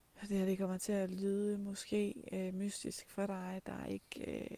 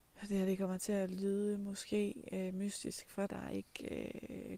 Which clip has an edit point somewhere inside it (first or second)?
second